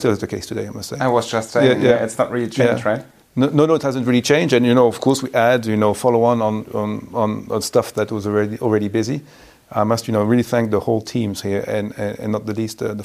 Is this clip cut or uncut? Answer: uncut